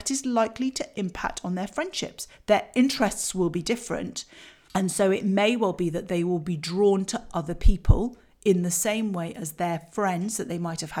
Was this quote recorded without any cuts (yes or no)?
yes